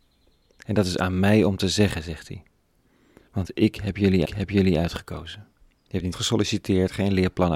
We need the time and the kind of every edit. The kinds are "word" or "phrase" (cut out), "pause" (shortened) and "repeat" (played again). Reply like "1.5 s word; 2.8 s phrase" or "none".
4.2 s repeat; 6.1 s word

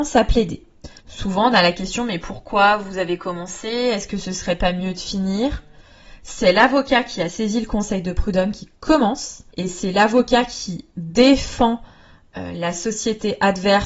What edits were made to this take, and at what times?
1.0 s pause; 9.5 s pause

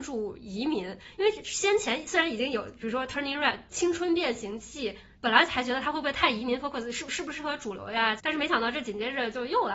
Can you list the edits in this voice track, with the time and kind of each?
none

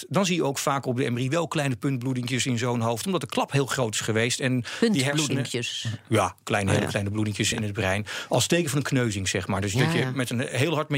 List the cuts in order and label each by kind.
7.5 s word

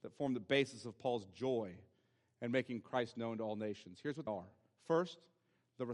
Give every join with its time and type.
4.3 s word

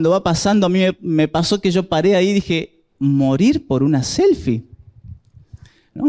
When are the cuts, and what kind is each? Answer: none

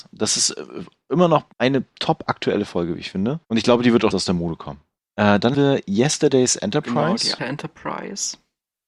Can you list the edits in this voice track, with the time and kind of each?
1.5 s pause; 3.4 s pause; 4.1 s word; 5.0 s pause; 5.5 s word; 7.4 s word

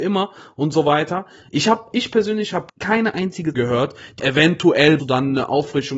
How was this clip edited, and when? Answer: 1.9 s word; 2.7 s pause; 3.5 s word; 4.2 s phrase; 5.0 s word

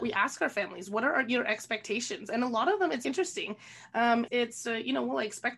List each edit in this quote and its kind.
3.0 s word; 4.3 s word

